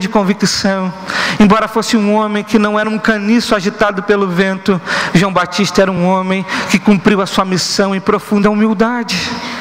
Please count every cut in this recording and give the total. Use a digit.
0